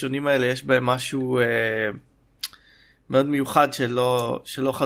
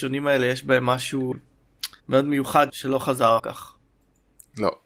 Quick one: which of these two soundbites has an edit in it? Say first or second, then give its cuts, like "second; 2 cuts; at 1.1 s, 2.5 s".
second; 4 cuts; at 1.3 s, 2.0 s, 2.7 s, 3.4 s